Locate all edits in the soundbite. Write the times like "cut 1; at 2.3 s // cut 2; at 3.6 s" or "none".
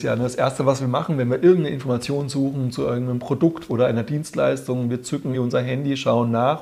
cut 1; at 5.3 s